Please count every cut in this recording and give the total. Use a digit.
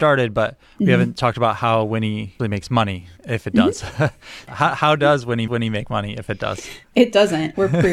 5